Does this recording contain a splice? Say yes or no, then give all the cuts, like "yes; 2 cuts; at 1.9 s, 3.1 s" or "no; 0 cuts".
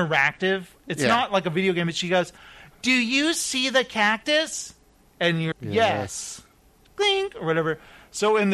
yes; 1 cut; at 5.5 s